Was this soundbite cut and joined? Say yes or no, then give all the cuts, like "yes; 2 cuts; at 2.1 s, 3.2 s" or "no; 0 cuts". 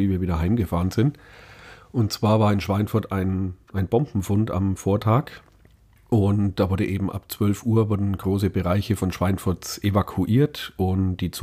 no; 0 cuts